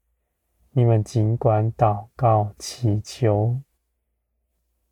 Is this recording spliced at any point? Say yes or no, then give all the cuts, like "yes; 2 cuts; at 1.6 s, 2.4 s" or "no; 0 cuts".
no; 0 cuts